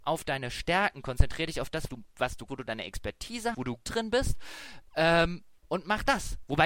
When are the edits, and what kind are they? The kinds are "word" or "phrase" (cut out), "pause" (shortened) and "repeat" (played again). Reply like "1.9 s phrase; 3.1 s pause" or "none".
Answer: 1.9 s word; 2.5 s word; 3.5 s word; 3.9 s word; 5.6 s pause